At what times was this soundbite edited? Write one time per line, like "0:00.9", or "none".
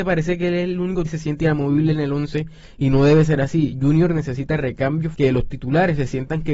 0:01.1
0:05.1